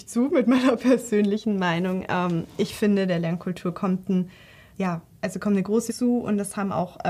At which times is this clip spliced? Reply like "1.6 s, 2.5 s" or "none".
4.7 s, 5.9 s